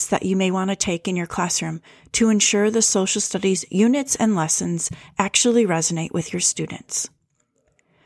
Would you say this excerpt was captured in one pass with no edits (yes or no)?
yes